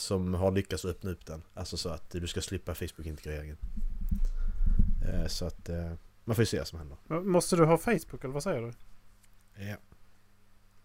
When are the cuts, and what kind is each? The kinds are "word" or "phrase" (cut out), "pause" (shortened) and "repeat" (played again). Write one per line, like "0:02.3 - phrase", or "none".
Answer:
0:01.5 - pause
0:06.1 - pause